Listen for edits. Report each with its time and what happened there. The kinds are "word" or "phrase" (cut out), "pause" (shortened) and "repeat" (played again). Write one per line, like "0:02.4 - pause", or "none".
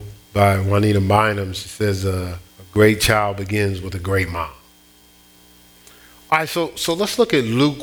0:02.5 - pause